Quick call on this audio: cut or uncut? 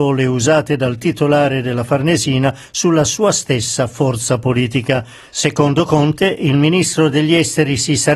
uncut